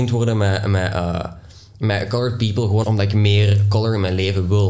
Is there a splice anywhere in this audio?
yes; 1 cut; at 2.8 s

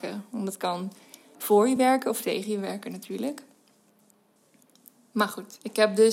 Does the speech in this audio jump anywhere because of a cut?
no; 0 cuts

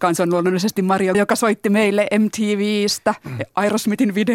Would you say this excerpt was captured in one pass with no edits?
no; 1 cut; at 1.1 s

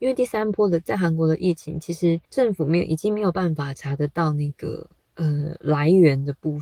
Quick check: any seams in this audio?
yes; 2 cuts; at 2.2 s, 5.0 s

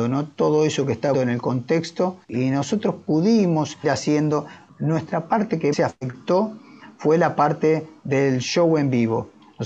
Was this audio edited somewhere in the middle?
yes; 4 cuts; at 1.1 s, 2.2 s, 3.8 s, 5.7 s

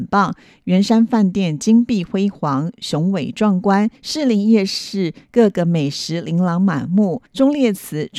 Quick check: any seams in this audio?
yes; 2 cuts; at 4.0 s, 7.3 s

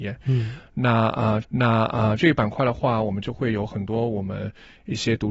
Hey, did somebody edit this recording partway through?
yes; 1 cut; at 1.4 s

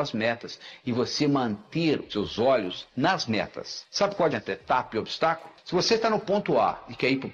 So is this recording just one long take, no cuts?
no; 2 cuts; at 2.1 s, 4.3 s

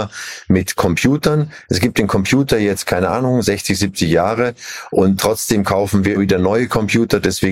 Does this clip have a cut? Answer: yes; 1 cut; at 6.2 s

